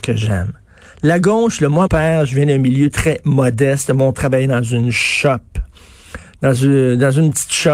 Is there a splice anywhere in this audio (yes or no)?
yes